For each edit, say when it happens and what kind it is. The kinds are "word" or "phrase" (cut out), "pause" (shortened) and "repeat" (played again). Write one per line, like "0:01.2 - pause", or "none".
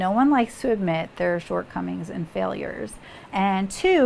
none